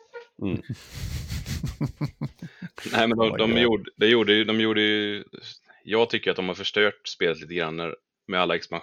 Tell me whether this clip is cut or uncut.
uncut